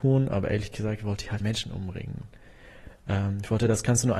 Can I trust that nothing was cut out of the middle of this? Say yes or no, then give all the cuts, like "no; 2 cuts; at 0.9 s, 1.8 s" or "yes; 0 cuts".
no; 1 cut; at 1.4 s